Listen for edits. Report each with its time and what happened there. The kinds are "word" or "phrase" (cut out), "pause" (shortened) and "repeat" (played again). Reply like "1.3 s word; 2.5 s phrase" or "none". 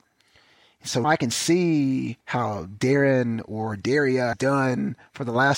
1.0 s word; 2.2 s pause; 4.3 s word